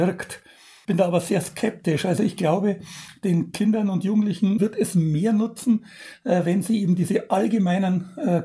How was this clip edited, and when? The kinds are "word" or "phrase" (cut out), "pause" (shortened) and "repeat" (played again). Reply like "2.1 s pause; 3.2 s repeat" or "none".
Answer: none